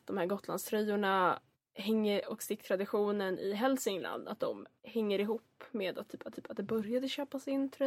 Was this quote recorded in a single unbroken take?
no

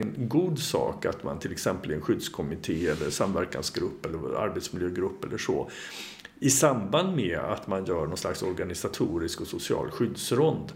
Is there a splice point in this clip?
no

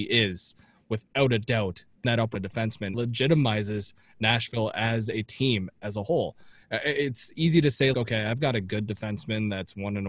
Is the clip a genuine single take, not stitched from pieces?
no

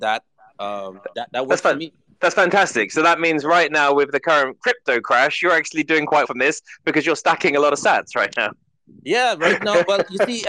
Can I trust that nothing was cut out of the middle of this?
no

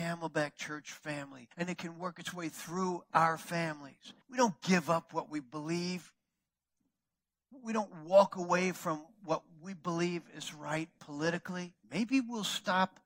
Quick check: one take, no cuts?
no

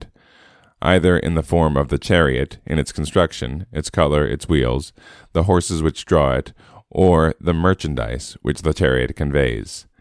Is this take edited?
no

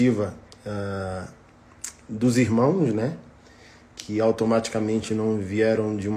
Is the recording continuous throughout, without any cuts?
yes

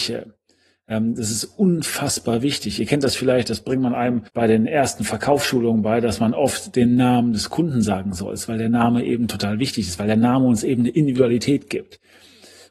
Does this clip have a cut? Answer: yes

